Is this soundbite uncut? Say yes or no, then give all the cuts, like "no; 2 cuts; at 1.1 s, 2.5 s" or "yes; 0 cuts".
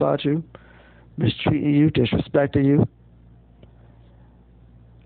yes; 0 cuts